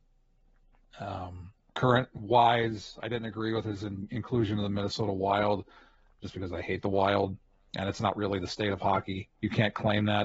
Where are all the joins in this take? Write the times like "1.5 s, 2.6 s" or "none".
none